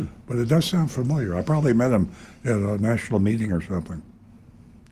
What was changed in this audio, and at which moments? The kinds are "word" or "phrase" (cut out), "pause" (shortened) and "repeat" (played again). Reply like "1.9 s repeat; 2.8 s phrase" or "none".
none